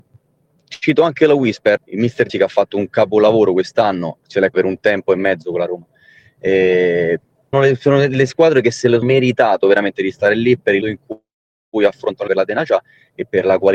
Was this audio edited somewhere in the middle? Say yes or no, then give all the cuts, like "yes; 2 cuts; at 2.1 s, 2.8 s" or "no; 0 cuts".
yes; 8 cuts; at 1.8 s, 2.3 s, 4.2 s, 4.5 s, 7.5 s, 9.0 s, 10.8 s, 12.3 s